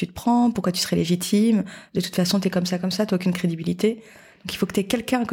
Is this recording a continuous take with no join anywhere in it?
yes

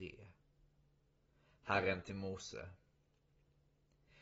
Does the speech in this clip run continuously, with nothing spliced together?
no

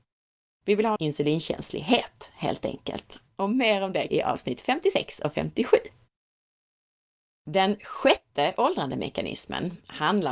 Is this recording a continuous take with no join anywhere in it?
no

